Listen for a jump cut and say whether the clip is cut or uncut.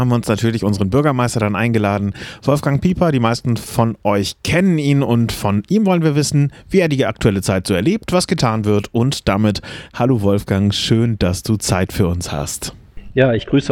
uncut